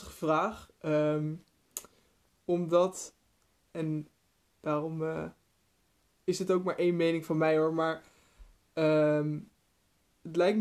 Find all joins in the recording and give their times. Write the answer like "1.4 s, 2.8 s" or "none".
none